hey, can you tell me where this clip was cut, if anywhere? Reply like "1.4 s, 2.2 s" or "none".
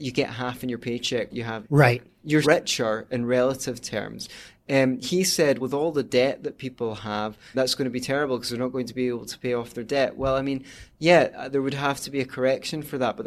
1.3 s, 1.6 s, 2.4 s, 5.6 s, 7.5 s